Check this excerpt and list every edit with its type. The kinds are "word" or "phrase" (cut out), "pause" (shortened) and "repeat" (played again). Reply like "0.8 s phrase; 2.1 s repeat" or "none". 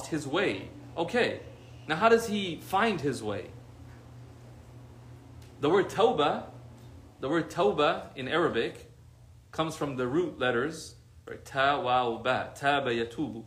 none